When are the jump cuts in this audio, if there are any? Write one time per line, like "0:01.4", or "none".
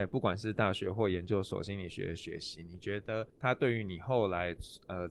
0:03.3